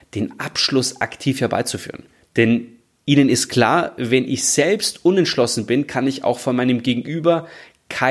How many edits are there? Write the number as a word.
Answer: one